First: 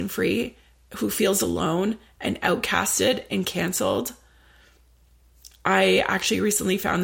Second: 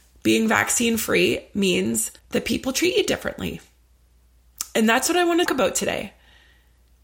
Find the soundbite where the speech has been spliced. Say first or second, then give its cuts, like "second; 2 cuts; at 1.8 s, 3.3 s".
second; 2 cuts; at 2.2 s, 5.5 s